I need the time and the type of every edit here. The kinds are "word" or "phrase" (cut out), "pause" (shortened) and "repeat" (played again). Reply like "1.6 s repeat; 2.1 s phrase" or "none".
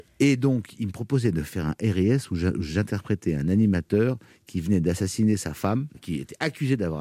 5.9 s word